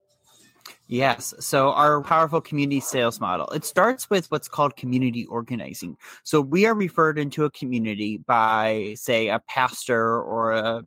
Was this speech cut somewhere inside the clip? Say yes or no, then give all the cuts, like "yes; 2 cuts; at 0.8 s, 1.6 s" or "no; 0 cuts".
yes; 1 cut; at 2.0 s